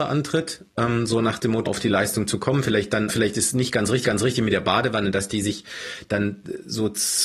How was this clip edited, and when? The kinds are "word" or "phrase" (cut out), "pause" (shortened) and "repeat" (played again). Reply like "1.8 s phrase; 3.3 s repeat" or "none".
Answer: 1.6 s word; 3.1 s word; 4.0 s repeat